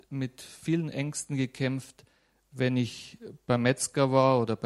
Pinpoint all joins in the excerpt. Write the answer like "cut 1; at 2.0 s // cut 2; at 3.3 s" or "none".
none